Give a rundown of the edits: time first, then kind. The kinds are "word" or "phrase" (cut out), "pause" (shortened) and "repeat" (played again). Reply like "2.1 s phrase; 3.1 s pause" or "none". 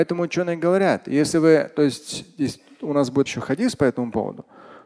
3.3 s word